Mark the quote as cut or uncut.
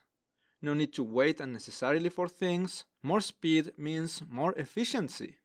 cut